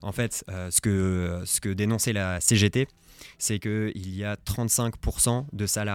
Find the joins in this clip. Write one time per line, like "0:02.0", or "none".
none

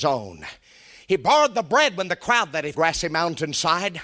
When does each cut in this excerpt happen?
0:02.7

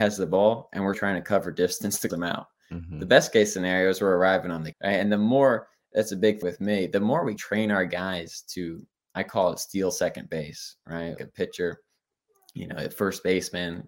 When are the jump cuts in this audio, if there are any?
0:00.9
0:02.1
0:04.7
0:06.4
0:07.4
0:11.2

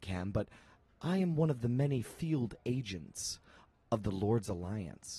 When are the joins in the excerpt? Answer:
none

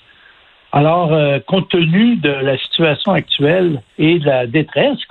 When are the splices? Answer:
0:03.9

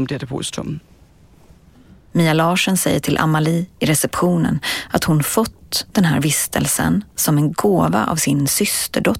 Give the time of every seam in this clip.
none

